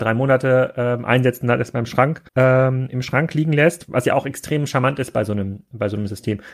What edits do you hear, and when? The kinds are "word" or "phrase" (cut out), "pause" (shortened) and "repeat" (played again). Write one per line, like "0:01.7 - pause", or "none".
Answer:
0:02.3 - pause